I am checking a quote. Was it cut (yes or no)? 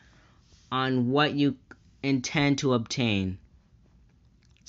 no